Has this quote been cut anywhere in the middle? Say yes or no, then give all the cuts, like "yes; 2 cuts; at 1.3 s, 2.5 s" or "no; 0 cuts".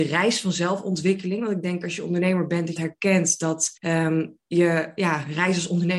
yes; 2 cuts; at 2.8 s, 3.8 s